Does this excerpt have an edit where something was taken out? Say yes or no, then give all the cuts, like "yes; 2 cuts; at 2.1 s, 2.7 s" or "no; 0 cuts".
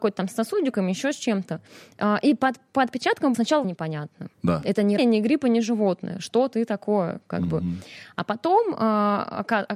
yes; 4 cuts; at 3.3 s, 3.6 s, 4.3 s, 5.0 s